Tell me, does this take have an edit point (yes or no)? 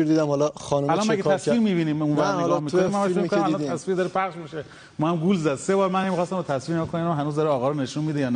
no